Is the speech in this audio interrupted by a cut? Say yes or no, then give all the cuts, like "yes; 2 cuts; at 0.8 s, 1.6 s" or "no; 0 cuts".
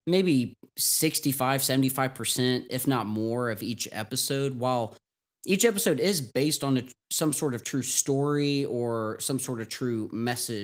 no; 0 cuts